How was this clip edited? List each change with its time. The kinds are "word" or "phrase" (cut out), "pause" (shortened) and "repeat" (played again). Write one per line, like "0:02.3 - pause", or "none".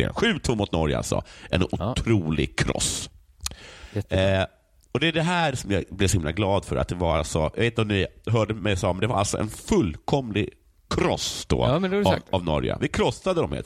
none

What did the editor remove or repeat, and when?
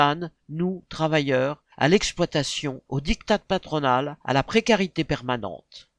0:01.7 - pause
0:02.9 - pause
0:04.2 - pause

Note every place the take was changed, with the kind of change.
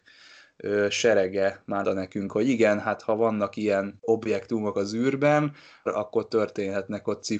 0:01.8 - word
0:05.9 - word

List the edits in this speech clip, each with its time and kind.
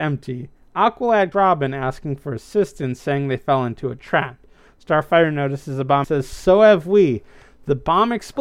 0:01.3 - word
0:06.0 - word

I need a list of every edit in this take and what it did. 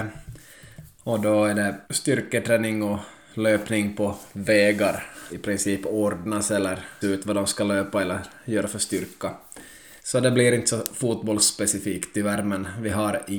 0:01.8 - pause
0:05.3 - word
0:07.0 - word
0:10.0 - pause

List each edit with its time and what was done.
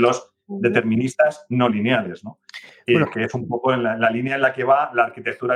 none

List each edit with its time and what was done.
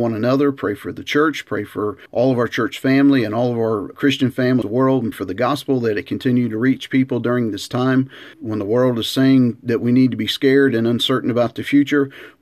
0:02.1 - pause
0:03.9 - word
0:04.6 - phrase
0:05.1 - word
0:08.3 - word

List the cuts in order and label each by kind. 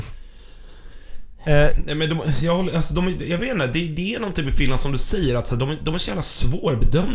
none

